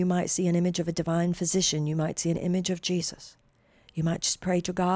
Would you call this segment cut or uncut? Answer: uncut